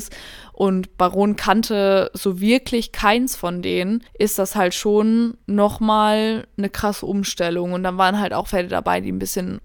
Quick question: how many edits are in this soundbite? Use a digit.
2